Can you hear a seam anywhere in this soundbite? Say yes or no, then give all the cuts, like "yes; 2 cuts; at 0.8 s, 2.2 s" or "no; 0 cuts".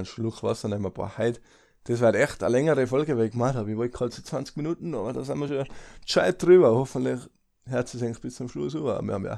no; 0 cuts